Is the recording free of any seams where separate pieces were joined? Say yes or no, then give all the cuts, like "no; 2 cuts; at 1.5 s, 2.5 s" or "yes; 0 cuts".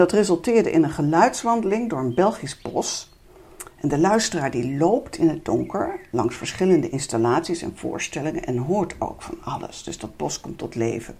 yes; 0 cuts